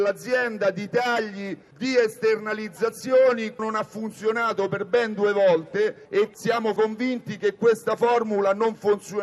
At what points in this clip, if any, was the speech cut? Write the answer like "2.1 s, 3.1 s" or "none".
3.6 s, 6.8 s